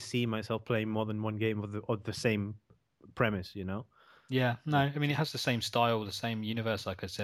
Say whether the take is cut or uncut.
uncut